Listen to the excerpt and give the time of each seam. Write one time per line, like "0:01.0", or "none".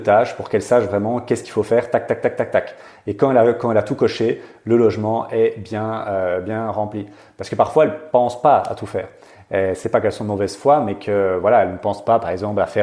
none